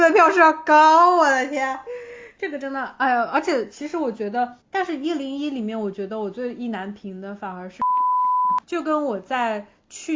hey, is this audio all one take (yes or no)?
no